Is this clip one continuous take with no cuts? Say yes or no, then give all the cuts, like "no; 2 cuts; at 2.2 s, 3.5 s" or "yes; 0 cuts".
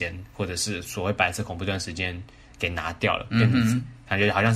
yes; 0 cuts